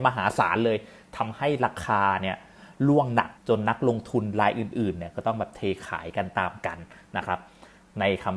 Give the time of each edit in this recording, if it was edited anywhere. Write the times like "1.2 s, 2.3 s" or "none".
3.4 s